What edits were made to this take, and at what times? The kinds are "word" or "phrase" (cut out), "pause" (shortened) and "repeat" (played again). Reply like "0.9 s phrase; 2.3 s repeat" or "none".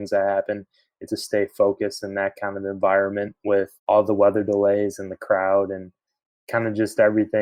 1.1 s word; 3.8 s pause